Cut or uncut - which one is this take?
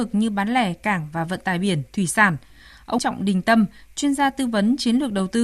cut